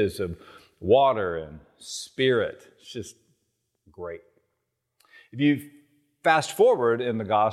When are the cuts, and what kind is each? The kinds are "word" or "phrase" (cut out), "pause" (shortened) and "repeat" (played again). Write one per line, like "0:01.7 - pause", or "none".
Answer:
none